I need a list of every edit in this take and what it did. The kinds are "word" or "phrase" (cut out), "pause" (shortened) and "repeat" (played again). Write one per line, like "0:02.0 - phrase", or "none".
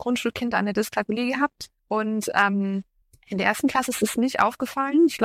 0:01.8 - pause
0:03.0 - pause